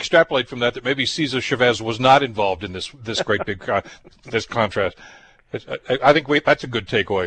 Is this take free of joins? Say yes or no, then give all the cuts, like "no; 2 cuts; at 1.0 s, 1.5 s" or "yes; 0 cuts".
yes; 0 cuts